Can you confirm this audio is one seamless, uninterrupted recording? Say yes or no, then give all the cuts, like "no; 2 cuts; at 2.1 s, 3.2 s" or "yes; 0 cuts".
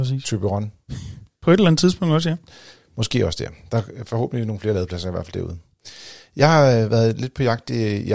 yes; 0 cuts